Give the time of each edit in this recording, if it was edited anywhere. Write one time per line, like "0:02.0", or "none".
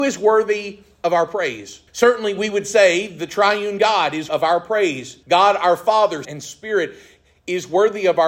0:01.9
0:04.3
0:05.2
0:06.2